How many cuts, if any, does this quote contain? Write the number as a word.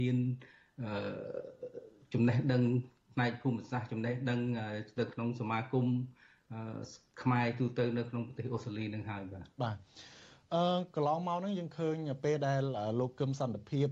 one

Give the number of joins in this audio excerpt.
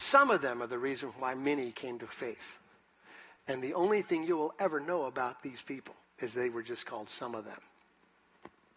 one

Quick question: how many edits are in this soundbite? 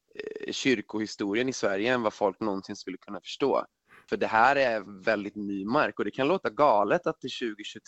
zero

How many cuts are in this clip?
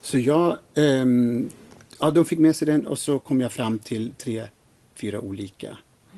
zero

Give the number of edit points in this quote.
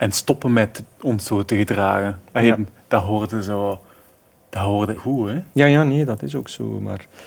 two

